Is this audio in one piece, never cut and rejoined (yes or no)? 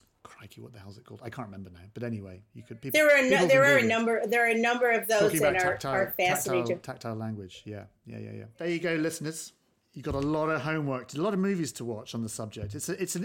yes